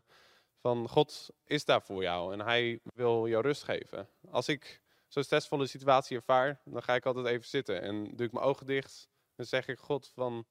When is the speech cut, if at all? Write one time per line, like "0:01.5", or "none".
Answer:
none

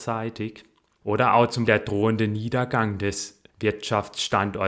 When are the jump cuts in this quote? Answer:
0:01.7
0:03.5

